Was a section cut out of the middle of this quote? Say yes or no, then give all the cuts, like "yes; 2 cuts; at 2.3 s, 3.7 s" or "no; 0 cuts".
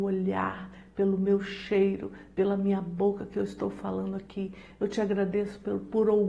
no; 0 cuts